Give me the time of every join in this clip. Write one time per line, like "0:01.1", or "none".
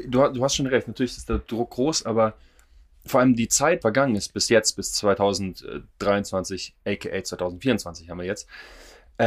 0:03.8